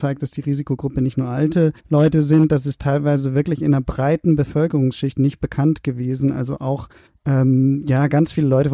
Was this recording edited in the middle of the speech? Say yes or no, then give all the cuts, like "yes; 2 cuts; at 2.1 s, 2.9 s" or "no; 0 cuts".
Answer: yes; 2 cuts; at 1.8 s, 7.1 s